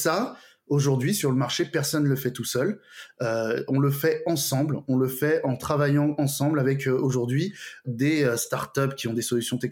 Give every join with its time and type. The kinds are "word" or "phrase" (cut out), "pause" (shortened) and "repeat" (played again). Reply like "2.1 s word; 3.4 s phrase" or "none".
7.8 s word